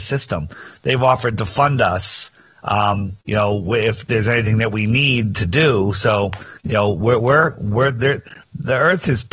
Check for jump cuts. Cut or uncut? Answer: cut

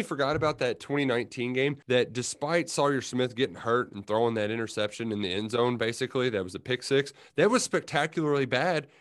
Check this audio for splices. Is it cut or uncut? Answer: cut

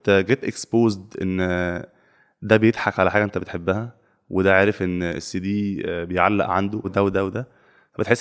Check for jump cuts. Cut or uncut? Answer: cut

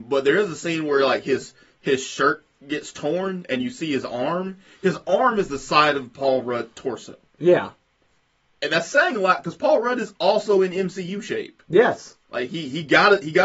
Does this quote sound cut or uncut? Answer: cut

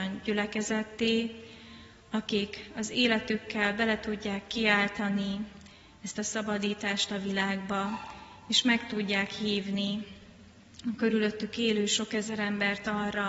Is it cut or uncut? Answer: uncut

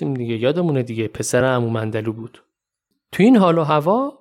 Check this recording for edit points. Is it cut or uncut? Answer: uncut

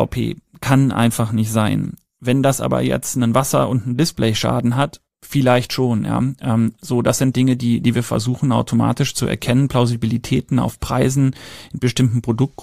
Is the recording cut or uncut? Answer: uncut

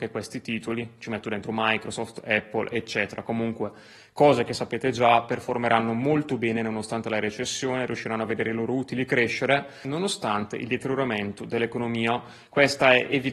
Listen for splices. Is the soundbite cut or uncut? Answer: uncut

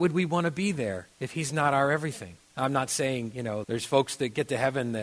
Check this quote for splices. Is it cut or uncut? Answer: cut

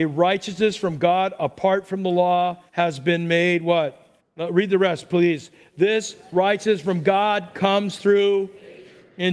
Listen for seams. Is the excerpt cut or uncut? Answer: cut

